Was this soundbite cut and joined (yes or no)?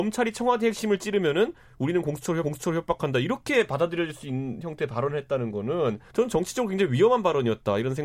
yes